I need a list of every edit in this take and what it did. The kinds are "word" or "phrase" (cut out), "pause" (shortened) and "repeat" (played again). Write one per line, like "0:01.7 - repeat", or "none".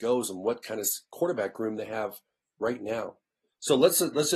none